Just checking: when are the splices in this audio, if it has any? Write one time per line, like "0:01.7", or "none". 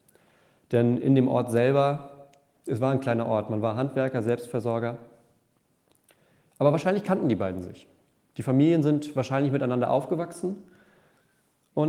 none